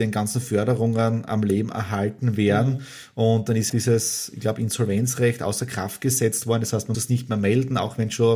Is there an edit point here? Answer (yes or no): yes